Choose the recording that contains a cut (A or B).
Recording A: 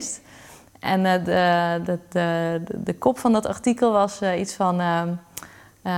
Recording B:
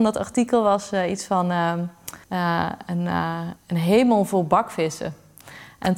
B